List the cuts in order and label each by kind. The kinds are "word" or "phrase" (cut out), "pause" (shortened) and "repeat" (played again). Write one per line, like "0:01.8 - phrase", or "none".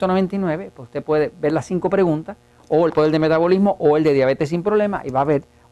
0:02.9 - phrase